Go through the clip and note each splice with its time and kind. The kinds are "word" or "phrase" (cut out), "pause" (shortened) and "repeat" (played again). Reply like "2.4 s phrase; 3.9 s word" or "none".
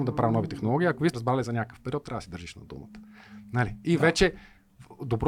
1.1 s word